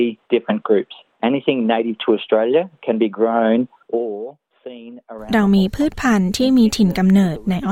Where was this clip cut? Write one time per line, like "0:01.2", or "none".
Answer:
none